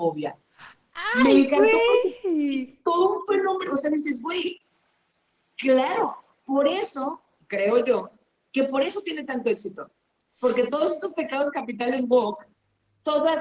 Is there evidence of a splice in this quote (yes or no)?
no